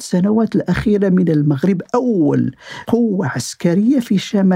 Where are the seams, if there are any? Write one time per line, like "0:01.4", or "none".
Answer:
none